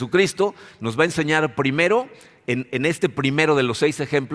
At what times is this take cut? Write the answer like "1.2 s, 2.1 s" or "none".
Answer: none